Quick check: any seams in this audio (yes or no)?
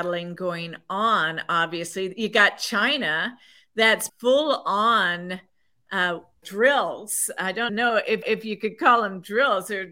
yes